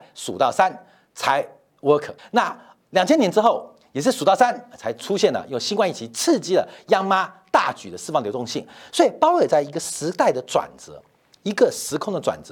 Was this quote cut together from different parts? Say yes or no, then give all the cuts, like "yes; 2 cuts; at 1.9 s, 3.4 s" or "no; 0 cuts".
yes; 1 cut; at 2.2 s